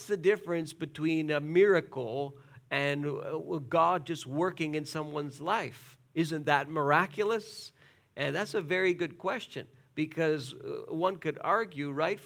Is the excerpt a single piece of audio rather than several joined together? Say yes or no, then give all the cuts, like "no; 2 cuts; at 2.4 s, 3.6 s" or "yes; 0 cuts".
yes; 0 cuts